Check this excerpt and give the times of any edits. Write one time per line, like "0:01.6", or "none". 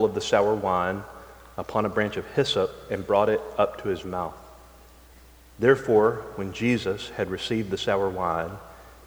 none